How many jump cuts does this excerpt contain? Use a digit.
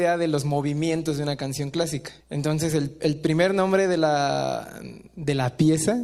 1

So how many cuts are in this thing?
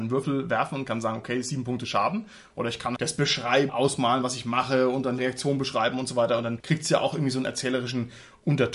3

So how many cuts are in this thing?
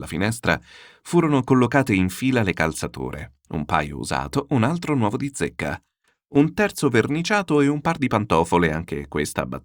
0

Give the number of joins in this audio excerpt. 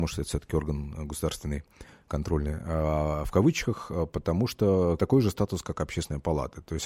0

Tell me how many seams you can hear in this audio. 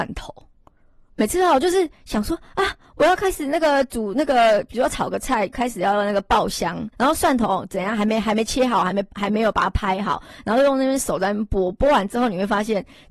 1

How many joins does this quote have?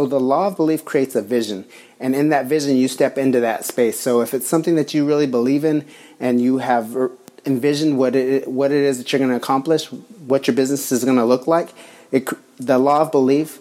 0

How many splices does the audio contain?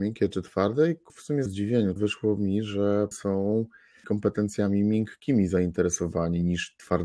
5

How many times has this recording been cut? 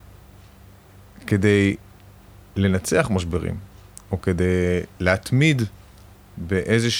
2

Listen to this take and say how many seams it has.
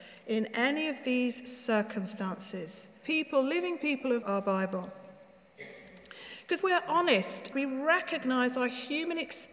4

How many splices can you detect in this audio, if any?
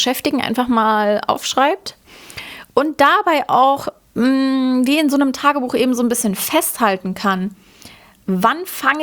0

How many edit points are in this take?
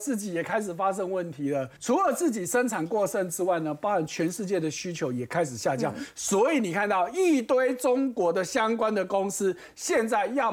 1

